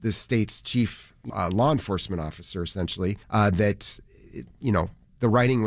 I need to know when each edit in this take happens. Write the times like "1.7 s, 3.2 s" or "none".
1.3 s, 3.2 s